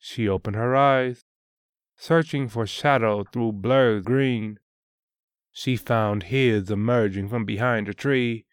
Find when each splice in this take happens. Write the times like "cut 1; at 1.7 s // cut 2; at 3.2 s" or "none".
cut 1; at 4.0 s